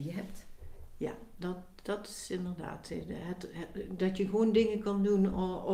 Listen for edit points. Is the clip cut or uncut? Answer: uncut